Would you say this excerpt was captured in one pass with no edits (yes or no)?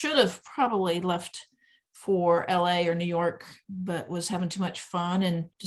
yes